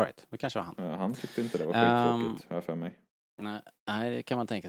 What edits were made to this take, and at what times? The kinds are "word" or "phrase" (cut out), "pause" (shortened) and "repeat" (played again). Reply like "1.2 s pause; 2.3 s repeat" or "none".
none